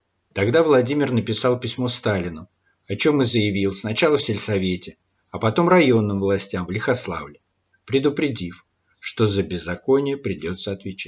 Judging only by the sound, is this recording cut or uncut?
uncut